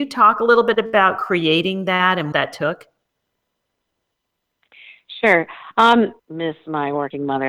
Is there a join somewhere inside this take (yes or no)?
yes